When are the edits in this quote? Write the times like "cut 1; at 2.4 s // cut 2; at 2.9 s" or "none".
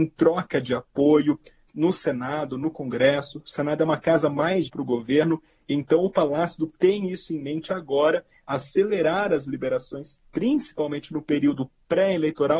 cut 1; at 1.7 s // cut 2; at 4.7 s // cut 3; at 6.7 s

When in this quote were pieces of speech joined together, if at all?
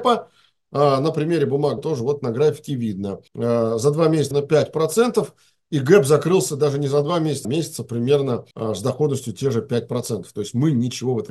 cut 1; at 1.8 s // cut 2; at 3.3 s // cut 3; at 4.3 s // cut 4; at 7.4 s // cut 5; at 8.5 s

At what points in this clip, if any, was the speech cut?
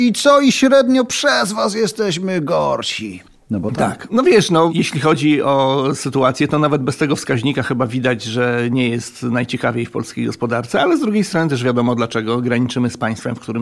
none

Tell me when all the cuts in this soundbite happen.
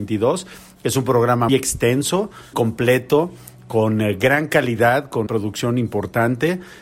cut 1; at 1.5 s // cut 2; at 2.5 s // cut 3; at 5.3 s

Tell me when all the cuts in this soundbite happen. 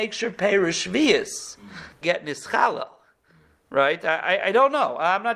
cut 1; at 2.0 s

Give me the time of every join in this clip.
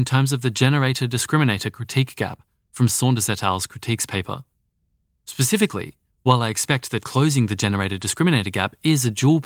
none

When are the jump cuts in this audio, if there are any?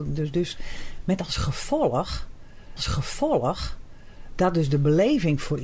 cut 1; at 2.8 s

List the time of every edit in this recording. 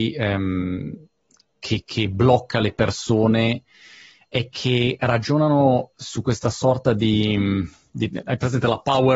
none

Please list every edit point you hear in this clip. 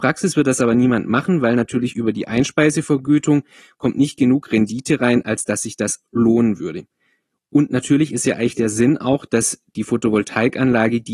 none

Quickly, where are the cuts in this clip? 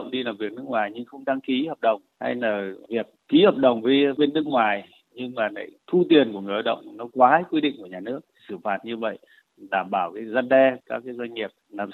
none

